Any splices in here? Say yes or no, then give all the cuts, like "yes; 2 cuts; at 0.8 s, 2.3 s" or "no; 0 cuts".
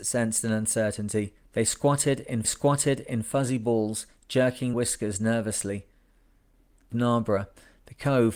yes; 4 cuts; at 1.4 s, 2.4 s, 4.7 s, 6.9 s